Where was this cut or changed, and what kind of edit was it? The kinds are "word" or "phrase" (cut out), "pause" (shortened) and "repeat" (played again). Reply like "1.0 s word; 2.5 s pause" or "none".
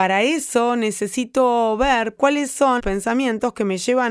2.2 s word; 2.8 s word